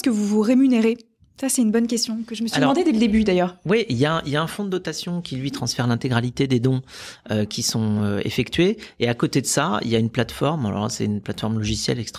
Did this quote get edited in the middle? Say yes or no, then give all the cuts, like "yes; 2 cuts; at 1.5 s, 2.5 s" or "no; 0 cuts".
no; 0 cuts